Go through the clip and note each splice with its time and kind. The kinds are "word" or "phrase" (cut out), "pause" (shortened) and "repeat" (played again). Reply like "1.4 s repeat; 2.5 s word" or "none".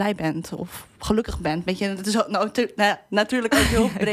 none